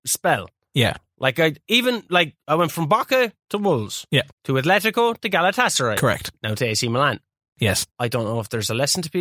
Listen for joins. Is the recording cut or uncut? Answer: cut